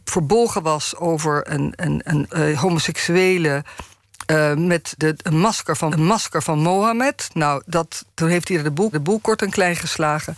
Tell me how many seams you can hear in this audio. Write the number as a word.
six